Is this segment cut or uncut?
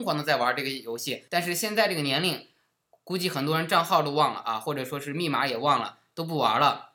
cut